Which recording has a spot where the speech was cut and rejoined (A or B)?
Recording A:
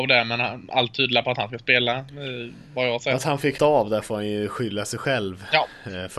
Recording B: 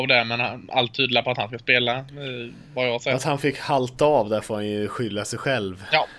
A